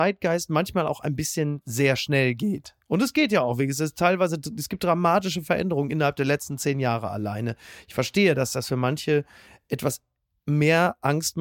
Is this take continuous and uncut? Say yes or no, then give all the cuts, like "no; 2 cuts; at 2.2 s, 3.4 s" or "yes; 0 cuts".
yes; 0 cuts